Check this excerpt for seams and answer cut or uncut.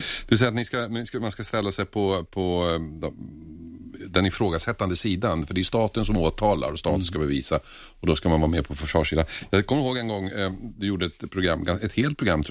uncut